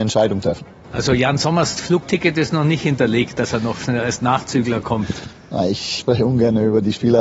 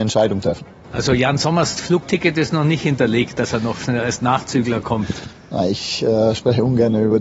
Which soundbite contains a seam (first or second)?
first